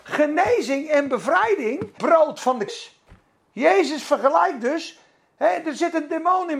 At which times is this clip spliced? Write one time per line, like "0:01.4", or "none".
0:02.0
0:02.7